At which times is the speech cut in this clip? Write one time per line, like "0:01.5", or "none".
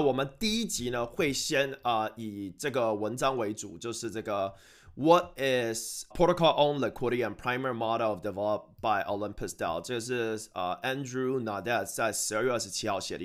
0:06.1